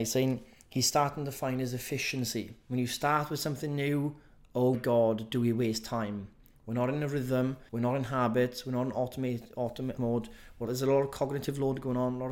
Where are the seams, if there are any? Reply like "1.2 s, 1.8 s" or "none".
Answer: 4.7 s, 7.7 s, 10.0 s, 10.7 s

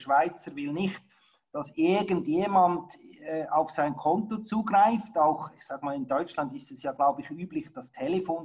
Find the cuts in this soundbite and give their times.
none

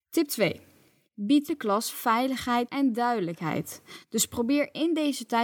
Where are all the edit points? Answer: 1.5 s, 1.9 s, 2.7 s

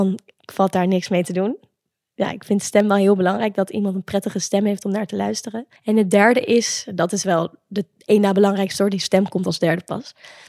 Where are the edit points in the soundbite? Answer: 5.8 s

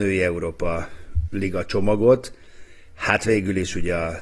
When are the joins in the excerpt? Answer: 1.3 s

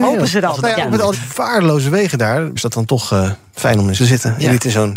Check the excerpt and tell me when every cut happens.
1.1 s, 2.6 s, 4.0 s

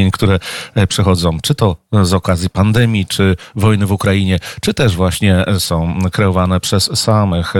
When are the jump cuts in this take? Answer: none

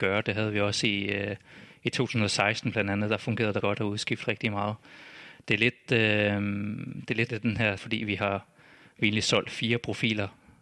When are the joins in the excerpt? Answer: 3.6 s, 7.3 s, 7.8 s

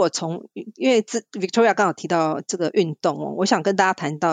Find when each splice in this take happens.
none

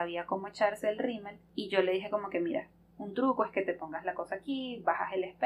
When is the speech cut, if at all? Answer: none

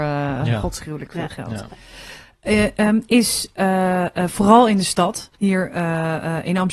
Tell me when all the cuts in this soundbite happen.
5.3 s

